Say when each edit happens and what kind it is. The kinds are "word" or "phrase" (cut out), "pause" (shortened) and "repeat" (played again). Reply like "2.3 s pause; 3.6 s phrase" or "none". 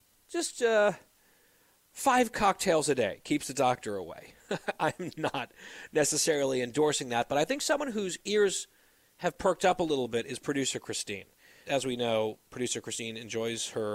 11.7 s word